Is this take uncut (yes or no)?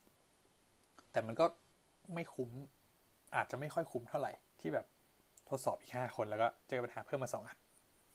no